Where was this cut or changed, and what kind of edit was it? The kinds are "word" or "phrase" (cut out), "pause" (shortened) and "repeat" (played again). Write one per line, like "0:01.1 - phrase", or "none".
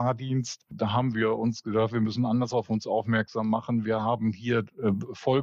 none